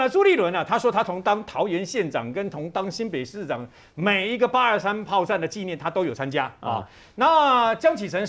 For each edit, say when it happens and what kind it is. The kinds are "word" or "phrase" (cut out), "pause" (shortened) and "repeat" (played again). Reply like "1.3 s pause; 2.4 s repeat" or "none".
none